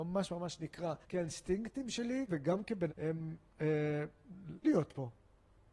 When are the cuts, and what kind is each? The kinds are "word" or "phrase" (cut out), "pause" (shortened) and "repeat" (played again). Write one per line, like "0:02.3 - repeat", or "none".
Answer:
0:01.0 - pause
0:02.3 - word
0:02.9 - word
0:04.6 - word